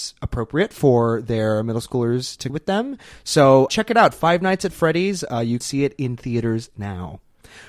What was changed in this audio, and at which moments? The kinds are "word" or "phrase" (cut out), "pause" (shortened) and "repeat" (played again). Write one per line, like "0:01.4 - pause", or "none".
0:02.5 - phrase
0:03.7 - word
0:05.6 - word